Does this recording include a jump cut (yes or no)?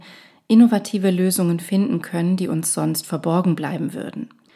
no